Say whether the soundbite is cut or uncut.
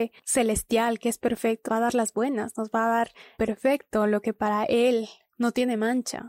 cut